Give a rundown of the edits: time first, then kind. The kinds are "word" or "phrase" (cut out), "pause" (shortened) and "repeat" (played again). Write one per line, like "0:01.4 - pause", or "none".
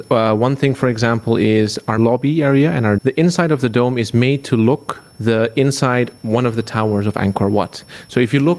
0:02.0 - word
0:03.0 - word
0:05.1 - word
0:06.2 - word